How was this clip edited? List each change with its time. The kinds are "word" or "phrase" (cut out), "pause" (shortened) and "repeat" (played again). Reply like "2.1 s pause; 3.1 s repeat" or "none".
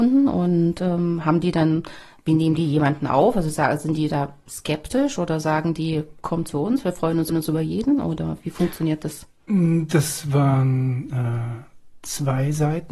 7.3 s repeat